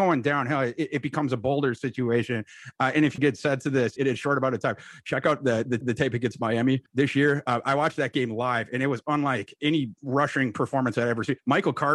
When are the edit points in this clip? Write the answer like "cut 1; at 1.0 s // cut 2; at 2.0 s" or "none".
cut 1; at 3.2 s // cut 2; at 4.0 s // cut 3; at 5.8 s // cut 4; at 6.9 s